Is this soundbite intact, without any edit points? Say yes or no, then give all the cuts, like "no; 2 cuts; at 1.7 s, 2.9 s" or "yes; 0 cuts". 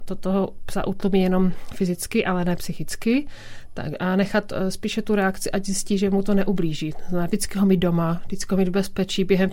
yes; 0 cuts